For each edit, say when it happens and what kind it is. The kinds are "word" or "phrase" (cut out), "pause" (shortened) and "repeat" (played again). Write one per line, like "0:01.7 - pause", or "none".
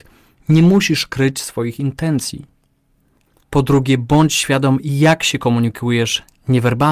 none